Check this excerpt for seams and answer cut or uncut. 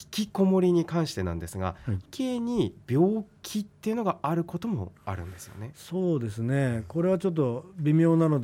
cut